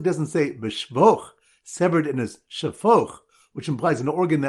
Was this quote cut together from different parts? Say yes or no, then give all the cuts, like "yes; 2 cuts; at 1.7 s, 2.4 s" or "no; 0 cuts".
no; 0 cuts